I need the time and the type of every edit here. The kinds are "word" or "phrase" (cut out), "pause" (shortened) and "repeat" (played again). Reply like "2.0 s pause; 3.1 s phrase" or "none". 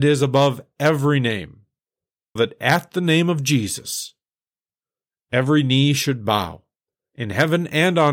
2.4 s word